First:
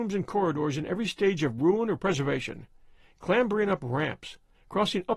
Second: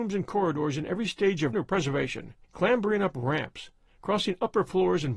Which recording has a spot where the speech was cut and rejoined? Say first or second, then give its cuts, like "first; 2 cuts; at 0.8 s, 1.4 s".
second; 2 cuts; at 1.5 s, 2.4 s